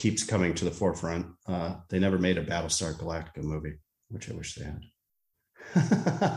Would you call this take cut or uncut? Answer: uncut